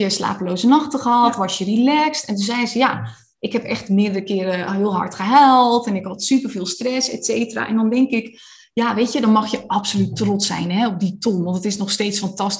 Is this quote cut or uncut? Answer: uncut